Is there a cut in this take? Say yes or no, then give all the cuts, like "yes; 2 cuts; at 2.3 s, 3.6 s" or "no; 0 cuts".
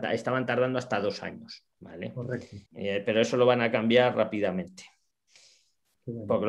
yes; 2 cuts; at 1.7 s, 2.7 s